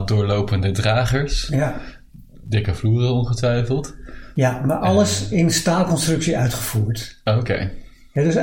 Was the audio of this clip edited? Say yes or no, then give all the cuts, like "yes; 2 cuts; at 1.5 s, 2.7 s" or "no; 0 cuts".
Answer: no; 0 cuts